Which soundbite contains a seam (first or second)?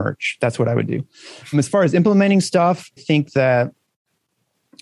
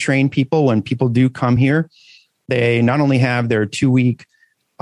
first